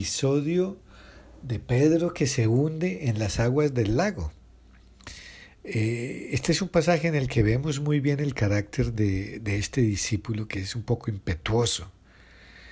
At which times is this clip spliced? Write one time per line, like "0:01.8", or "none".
none